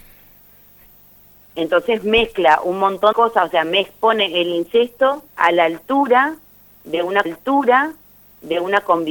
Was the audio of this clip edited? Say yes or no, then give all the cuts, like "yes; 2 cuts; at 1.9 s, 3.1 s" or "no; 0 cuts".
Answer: yes; 3 cuts; at 3.1 s, 5.3 s, 7.2 s